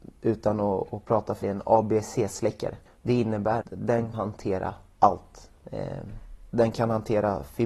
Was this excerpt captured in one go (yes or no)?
no